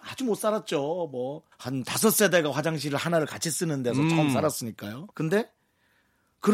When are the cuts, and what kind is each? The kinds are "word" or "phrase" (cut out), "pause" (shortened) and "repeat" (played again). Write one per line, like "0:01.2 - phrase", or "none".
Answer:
0:01.5 - pause
0:05.1 - pause